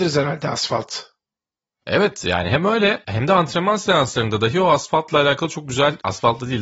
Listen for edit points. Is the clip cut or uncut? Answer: uncut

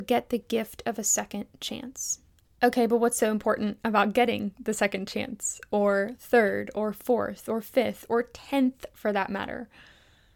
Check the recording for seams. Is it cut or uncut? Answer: cut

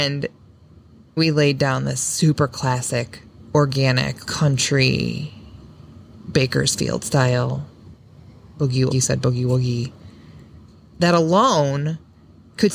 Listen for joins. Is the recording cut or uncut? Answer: cut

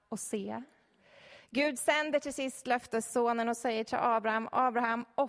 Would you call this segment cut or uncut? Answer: uncut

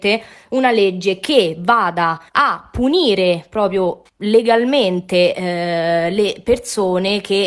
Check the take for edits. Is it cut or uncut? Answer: cut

